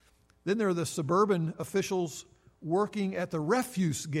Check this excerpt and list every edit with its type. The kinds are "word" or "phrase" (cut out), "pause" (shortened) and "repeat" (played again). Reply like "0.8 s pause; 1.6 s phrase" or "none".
none